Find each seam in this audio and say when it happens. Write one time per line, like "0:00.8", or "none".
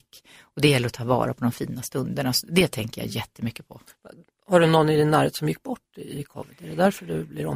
none